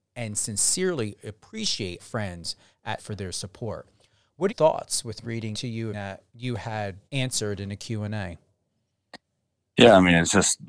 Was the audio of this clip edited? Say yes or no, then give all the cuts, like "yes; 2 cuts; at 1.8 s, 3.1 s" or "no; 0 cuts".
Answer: yes; 8 cuts; at 2.0 s, 3.0 s, 4.5 s, 5.2 s, 5.5 s, 5.9 s, 6.3 s, 7.1 s